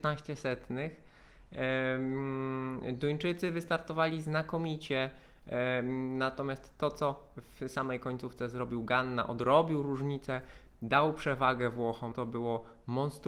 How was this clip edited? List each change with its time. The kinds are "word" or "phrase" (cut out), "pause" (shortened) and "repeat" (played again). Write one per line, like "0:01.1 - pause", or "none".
0:12.1 - word